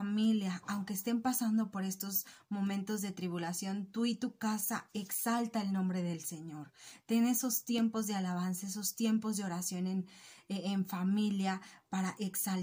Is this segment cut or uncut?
uncut